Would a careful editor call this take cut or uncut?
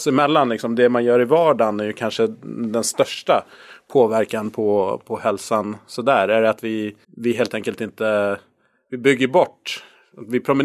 cut